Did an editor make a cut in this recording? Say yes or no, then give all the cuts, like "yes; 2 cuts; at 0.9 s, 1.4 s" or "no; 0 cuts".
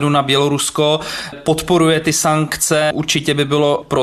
yes; 1 cut; at 1.3 s